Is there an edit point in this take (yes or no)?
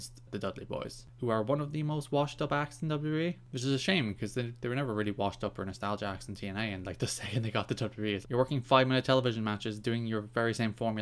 yes